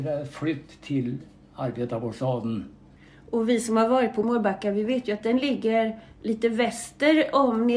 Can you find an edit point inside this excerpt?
no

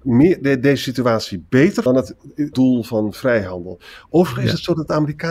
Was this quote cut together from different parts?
yes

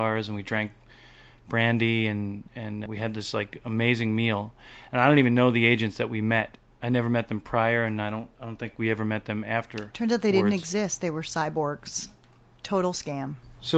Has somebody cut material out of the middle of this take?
yes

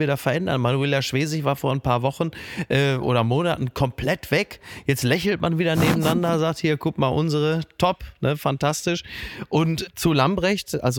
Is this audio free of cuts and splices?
yes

